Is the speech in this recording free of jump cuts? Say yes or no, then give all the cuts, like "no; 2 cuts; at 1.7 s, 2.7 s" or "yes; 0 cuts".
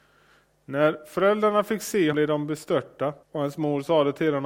no; 2 cuts; at 2.1 s, 3.2 s